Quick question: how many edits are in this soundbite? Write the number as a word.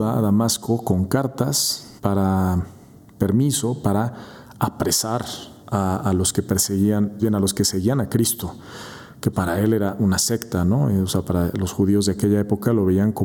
four